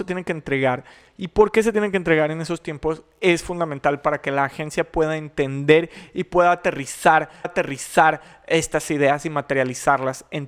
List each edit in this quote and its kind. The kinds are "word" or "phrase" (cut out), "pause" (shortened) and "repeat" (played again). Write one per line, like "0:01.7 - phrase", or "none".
0:07.4 - repeat